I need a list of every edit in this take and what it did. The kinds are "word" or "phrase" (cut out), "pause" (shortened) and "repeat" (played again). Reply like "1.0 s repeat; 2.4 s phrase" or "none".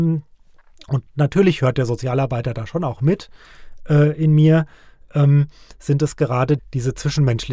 6.6 s word